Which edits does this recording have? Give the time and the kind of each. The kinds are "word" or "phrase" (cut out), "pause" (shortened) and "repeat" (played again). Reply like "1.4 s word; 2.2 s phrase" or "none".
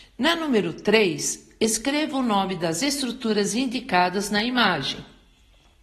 none